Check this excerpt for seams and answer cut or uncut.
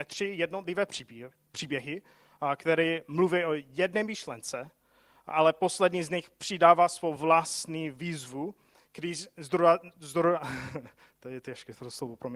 uncut